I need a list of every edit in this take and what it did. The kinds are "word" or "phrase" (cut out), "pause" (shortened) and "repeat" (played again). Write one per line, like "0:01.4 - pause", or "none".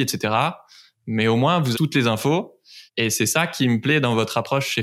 0:01.7 - word
0:02.9 - pause